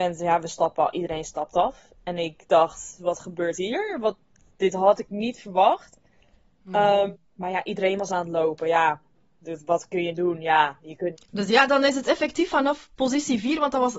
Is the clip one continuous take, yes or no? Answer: yes